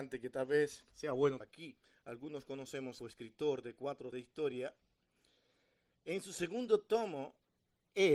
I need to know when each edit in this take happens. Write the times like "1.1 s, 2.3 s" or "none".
0.9 s, 1.4 s, 1.8 s, 3.0 s, 4.1 s